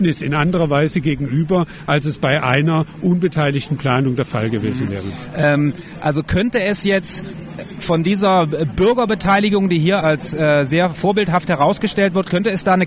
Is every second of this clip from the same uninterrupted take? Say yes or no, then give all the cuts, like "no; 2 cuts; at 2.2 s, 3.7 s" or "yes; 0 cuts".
no; 1 cut; at 10.0 s